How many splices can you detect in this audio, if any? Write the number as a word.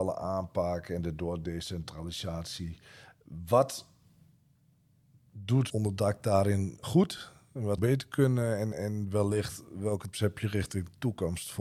five